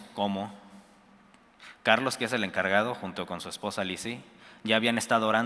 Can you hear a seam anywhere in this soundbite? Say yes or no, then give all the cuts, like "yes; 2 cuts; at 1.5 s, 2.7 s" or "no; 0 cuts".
no; 0 cuts